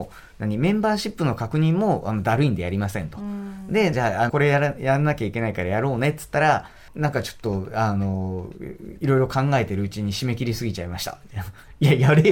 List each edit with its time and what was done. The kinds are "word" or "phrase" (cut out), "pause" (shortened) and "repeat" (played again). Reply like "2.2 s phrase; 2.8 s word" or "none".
3.9 s phrase; 4.3 s word; 6.9 s pause